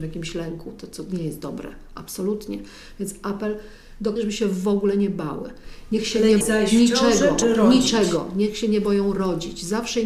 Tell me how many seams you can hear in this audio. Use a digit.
3